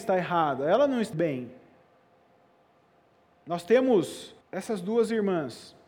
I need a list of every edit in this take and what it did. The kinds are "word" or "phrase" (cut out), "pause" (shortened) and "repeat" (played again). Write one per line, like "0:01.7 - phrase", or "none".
0:01.1 - word
0:04.4 - pause